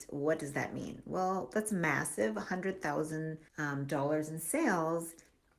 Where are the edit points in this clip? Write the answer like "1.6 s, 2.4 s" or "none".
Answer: 3.5 s